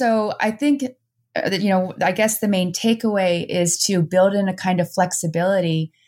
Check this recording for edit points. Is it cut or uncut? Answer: uncut